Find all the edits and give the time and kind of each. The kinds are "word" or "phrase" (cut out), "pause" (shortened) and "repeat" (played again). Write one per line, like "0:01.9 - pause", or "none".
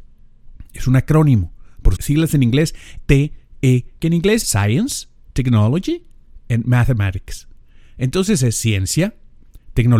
0:02.0 - word
0:03.0 - word
0:04.0 - word
0:04.4 - word
0:06.4 - word